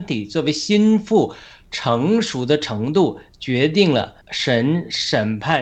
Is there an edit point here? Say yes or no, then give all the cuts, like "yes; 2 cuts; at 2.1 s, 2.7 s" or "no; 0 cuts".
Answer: yes; 1 cut; at 4.2 s